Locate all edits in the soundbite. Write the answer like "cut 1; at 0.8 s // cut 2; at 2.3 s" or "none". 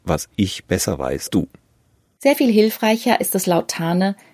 cut 1; at 1.3 s